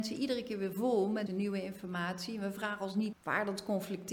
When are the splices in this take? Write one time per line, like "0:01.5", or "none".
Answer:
0:01.3
0:03.1

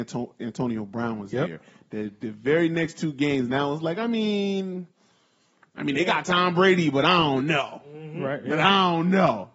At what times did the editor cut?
none

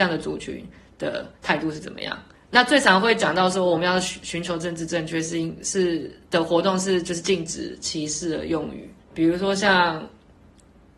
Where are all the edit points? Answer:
0:01.4
0:02.3
0:09.0

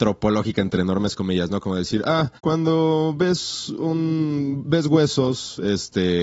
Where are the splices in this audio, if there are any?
0:02.4

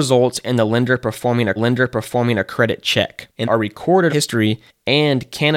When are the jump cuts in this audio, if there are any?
0:01.6
0:03.4
0:04.1

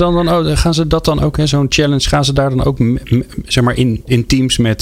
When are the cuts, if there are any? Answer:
none

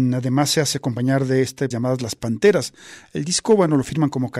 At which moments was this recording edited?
0:01.7

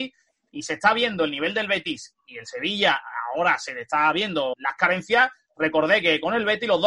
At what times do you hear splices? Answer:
none

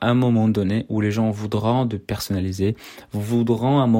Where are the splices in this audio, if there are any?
none

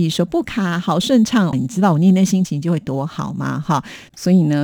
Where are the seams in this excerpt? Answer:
0:01.5

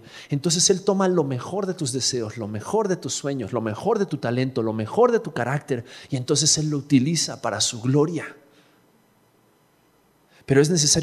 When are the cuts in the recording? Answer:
none

